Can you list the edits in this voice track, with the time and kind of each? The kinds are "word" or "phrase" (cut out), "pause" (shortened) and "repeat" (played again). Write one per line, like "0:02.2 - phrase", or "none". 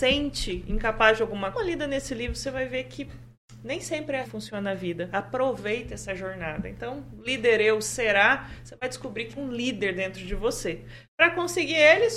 0:01.5 - phrase
0:04.2 - word
0:09.4 - word